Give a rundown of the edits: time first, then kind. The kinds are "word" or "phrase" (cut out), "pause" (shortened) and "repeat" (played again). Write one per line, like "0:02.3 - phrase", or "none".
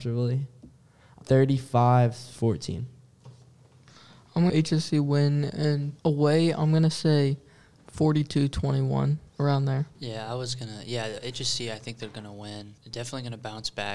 0:01.2 - word
0:04.5 - phrase
0:06.0 - pause
0:09.3 - pause
0:09.9 - pause
0:12.8 - pause